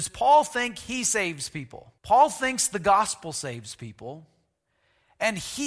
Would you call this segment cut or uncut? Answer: cut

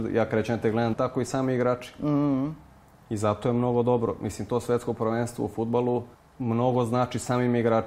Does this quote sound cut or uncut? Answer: cut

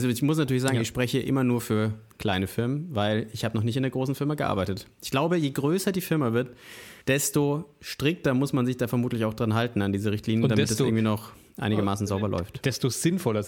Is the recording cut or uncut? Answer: cut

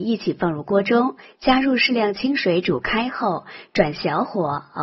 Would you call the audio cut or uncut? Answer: uncut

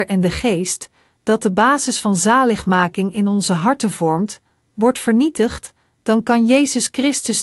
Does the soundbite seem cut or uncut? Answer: uncut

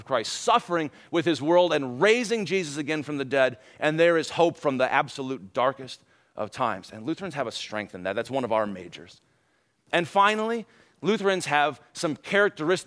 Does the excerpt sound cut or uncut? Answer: uncut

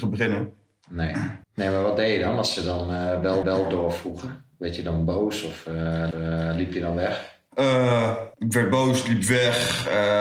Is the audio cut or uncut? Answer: cut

